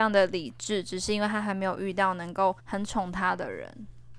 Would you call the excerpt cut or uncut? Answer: cut